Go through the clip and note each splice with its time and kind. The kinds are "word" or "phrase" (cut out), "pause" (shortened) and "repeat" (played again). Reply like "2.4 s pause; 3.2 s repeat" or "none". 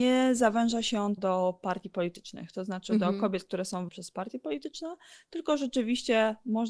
1.2 s word; 3.9 s word